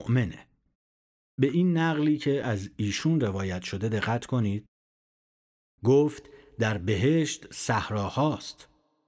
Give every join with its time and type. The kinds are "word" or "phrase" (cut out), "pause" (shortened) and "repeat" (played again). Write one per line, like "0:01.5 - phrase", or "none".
none